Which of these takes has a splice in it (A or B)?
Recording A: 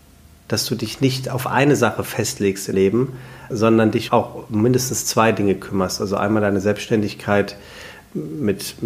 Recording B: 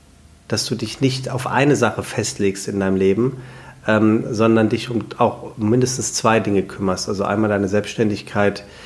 A